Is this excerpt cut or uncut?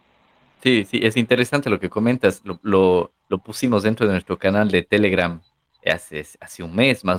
cut